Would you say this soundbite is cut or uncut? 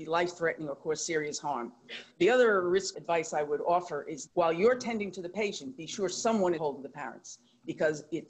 cut